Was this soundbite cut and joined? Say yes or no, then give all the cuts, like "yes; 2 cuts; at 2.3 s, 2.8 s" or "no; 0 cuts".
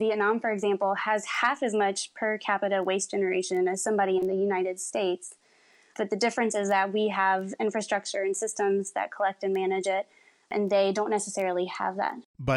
no; 0 cuts